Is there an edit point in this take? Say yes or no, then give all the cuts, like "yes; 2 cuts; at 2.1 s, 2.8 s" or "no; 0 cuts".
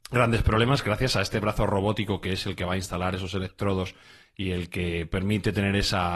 no; 0 cuts